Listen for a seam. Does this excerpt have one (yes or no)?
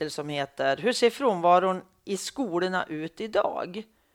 no